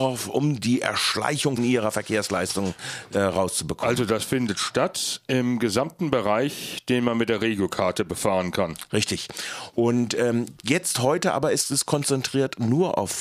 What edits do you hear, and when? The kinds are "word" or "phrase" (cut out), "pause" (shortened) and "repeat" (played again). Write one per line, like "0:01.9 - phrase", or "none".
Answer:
0:01.6 - phrase